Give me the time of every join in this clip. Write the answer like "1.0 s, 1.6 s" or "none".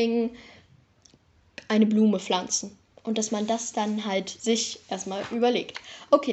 none